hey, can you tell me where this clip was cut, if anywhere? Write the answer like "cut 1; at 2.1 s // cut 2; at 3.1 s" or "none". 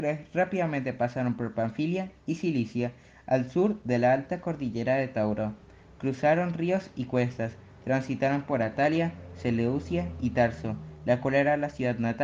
none